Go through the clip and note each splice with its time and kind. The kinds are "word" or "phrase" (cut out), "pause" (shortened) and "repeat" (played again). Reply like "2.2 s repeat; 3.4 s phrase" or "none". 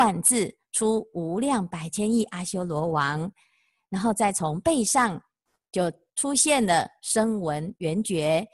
none